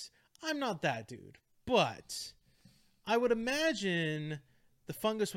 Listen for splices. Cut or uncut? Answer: uncut